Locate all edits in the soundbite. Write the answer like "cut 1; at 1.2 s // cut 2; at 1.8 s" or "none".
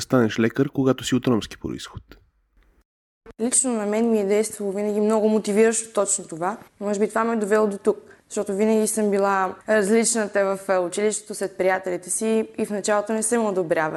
cut 1; at 6.7 s // cut 2; at 8.2 s // cut 3; at 9.6 s

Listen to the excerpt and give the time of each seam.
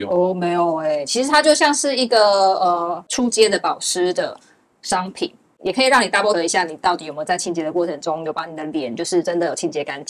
cut 1; at 6.3 s

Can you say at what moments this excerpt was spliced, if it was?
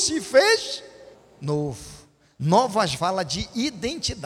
cut 1; at 1.1 s // cut 2; at 2.9 s

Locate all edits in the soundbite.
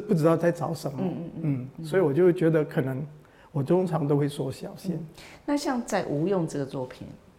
none

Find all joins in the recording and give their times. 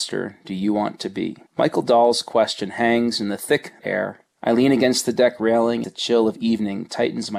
cut 1; at 1.5 s // cut 2; at 3.8 s // cut 3; at 5.8 s

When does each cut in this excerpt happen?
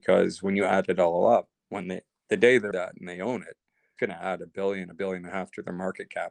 cut 1; at 1.5 s // cut 2; at 2.7 s // cut 3; at 4.0 s

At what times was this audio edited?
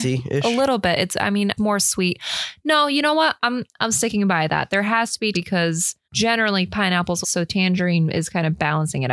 cut 1; at 1.6 s // cut 2; at 5.3 s // cut 3; at 6.0 s // cut 4; at 7.2 s

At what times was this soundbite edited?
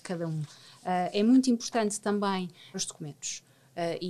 cut 1; at 2.7 s

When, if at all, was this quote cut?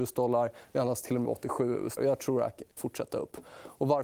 cut 1; at 1.2 s // cut 2; at 2.0 s // cut 3; at 2.8 s

